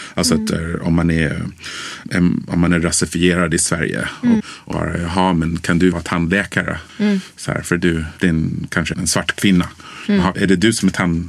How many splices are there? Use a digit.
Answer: 7